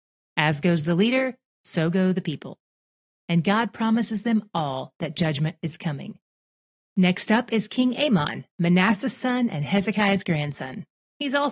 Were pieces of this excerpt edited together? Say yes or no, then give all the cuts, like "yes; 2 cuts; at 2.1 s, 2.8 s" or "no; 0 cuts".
no; 0 cuts